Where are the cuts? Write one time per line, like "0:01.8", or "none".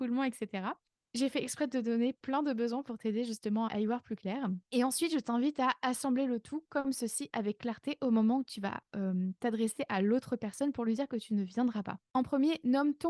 0:03.7
0:04.6
0:12.0